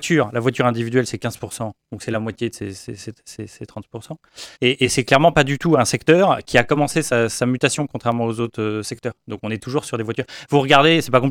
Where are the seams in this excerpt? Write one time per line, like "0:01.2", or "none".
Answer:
0:04.5